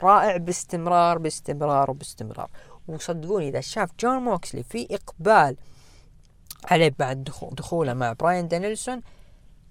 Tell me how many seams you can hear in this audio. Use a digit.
2